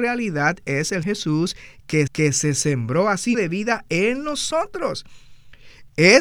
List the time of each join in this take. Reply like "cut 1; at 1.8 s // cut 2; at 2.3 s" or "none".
cut 1; at 1.0 s // cut 2; at 2.1 s // cut 3; at 3.3 s